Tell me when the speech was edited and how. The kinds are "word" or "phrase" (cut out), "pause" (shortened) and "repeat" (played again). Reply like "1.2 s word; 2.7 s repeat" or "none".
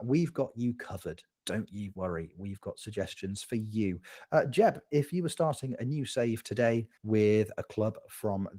7.0 s pause